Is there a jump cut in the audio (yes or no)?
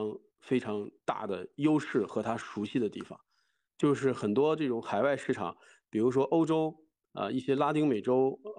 no